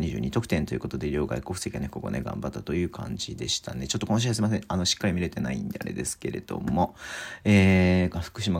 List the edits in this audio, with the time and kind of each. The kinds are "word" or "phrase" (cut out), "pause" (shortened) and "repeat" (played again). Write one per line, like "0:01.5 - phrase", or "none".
none